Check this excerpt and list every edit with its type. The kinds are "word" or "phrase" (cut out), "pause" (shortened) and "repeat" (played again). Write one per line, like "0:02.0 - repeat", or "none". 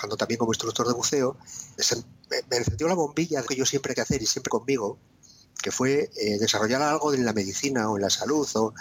0:01.8 - word
0:03.5 - word
0:04.0 - word
0:04.5 - word